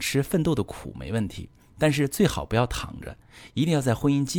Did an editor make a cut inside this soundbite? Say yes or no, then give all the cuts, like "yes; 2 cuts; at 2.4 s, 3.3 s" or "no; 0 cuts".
no; 0 cuts